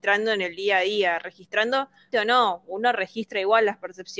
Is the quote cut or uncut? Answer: cut